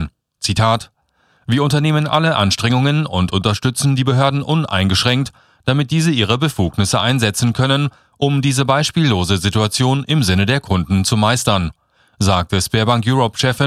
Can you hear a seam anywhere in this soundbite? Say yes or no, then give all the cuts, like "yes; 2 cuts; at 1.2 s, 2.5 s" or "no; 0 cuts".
no; 0 cuts